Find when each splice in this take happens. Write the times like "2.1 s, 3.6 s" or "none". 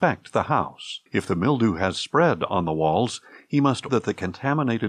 1.1 s, 3.9 s

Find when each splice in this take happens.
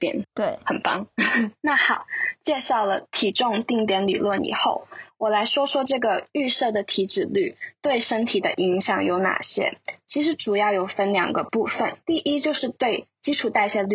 12.0 s

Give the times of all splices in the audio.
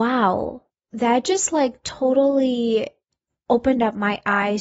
none

